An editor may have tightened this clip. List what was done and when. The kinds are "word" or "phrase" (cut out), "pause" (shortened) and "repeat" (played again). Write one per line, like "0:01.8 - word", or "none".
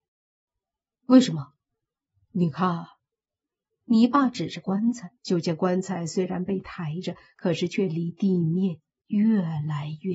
0:01.6 - pause
0:05.2 - pause